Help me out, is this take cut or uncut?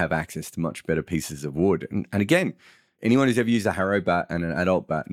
uncut